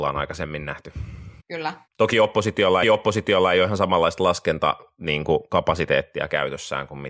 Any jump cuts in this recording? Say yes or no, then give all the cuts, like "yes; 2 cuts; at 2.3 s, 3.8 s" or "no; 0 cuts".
yes; 2 cuts; at 1.4 s, 2.8 s